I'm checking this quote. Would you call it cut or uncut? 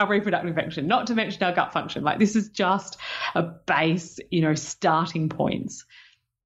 uncut